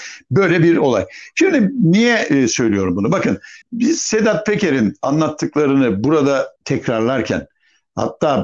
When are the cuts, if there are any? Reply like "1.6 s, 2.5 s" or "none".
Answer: 3.6 s, 6.6 s